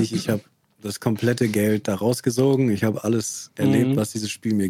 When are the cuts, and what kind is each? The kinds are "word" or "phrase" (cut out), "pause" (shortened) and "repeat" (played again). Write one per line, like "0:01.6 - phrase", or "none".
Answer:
none